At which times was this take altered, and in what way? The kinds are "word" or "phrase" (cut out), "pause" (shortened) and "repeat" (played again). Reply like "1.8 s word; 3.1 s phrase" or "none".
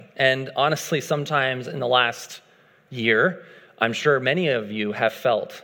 none